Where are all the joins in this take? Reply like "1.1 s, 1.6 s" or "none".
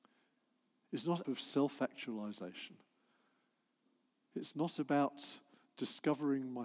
1.2 s